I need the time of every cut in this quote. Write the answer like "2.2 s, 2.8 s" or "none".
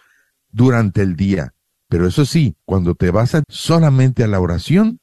2.6 s, 3.4 s